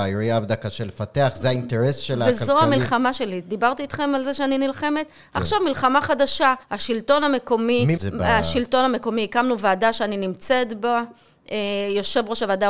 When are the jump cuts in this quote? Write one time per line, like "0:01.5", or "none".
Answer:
0:06.6
0:08.0